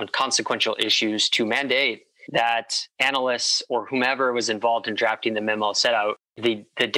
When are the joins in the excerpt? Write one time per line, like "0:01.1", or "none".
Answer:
none